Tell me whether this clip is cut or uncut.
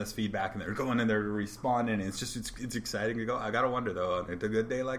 uncut